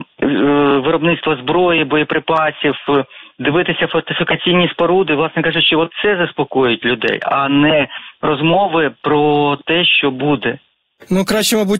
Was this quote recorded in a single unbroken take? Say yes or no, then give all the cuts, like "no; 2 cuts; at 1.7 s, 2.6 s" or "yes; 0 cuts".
yes; 0 cuts